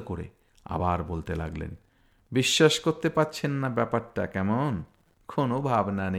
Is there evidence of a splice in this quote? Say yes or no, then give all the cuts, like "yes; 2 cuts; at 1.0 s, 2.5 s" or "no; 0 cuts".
no; 0 cuts